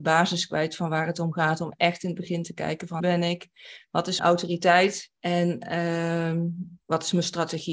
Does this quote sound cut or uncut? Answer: cut